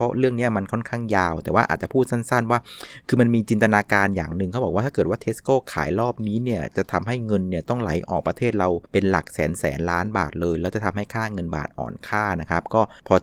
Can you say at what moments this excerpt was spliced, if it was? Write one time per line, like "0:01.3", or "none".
0:08.9